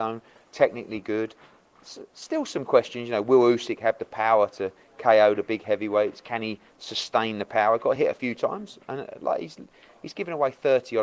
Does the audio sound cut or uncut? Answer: uncut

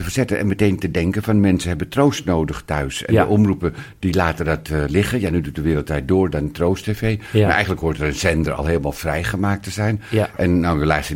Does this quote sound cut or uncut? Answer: uncut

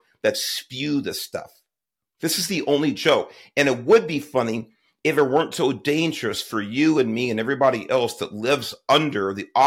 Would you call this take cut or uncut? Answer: uncut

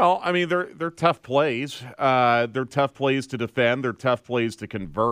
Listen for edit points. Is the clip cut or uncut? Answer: uncut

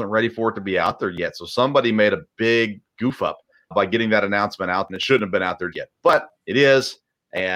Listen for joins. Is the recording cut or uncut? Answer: cut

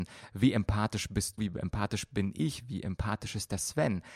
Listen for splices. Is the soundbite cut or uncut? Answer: cut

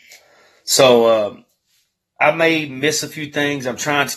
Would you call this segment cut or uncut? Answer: uncut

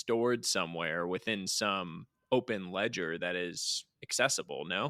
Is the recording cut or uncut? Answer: uncut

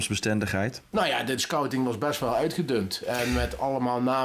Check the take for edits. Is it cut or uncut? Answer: cut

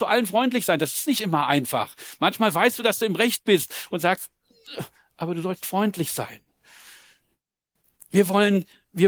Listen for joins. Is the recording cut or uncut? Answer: uncut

